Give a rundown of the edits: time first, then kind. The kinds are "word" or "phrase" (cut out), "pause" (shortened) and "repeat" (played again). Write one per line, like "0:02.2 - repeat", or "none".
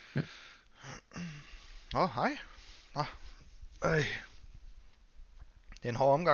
none